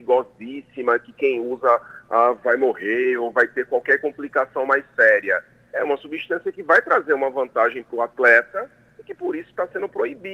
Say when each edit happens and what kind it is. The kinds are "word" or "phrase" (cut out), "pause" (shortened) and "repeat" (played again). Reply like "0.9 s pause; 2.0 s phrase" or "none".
none